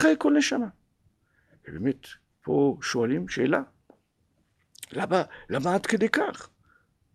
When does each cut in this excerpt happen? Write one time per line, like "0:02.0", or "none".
none